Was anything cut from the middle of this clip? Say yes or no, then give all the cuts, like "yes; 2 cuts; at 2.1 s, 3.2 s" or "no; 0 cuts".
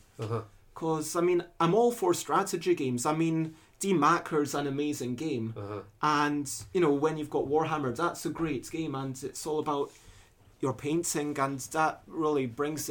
no; 0 cuts